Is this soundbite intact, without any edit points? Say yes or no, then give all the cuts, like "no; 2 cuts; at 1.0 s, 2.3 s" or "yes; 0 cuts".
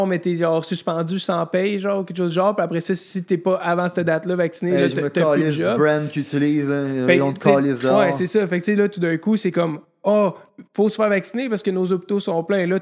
yes; 0 cuts